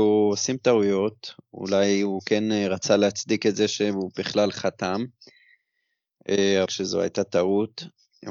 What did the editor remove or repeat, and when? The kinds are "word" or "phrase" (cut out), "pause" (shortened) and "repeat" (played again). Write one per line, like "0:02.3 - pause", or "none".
0:06.7 - phrase